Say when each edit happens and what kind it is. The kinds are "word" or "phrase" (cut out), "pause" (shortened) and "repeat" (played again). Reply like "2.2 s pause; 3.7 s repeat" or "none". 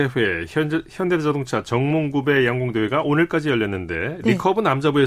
none